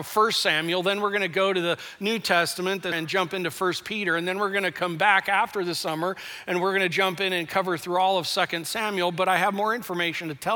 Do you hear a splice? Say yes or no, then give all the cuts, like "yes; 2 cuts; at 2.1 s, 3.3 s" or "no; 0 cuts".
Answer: yes; 1 cut; at 2.9 s